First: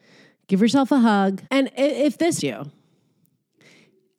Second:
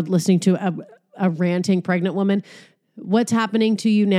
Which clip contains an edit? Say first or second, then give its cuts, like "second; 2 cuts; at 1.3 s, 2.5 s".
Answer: first; 2 cuts; at 1.4 s, 2.4 s